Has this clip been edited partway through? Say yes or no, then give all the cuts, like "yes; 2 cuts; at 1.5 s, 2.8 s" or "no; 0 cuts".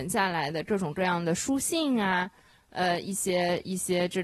no; 0 cuts